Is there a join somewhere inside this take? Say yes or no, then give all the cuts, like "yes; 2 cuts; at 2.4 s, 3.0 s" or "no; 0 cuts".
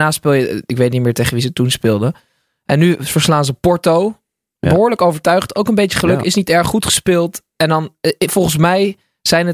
no; 0 cuts